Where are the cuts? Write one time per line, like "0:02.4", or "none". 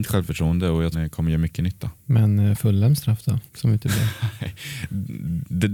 0:00.9
0:02.0
0:03.5